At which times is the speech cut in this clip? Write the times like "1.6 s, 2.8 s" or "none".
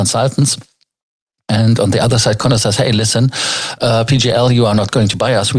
none

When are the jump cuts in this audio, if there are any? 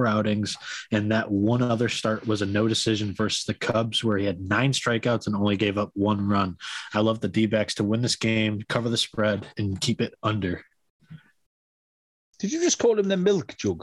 none

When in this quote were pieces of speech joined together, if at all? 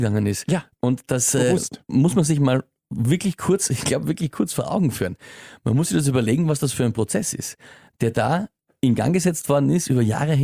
none

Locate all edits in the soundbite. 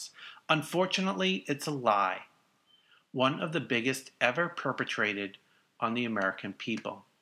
none

